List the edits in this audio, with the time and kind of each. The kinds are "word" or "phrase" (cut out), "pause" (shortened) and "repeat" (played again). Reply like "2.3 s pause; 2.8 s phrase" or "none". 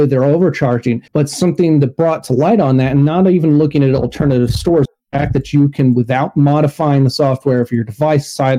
1.1 s pause